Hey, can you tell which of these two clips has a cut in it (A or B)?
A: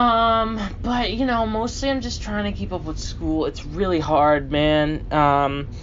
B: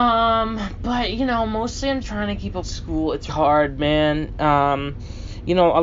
B